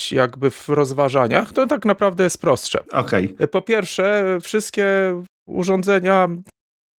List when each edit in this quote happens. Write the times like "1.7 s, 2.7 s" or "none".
5.3 s